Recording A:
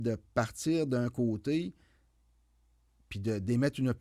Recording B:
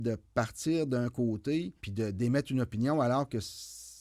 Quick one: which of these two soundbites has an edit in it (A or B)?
B